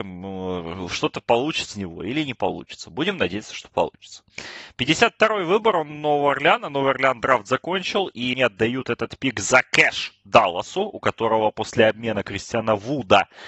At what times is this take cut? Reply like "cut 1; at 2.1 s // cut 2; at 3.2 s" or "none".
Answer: cut 1; at 1.7 s // cut 2; at 8.3 s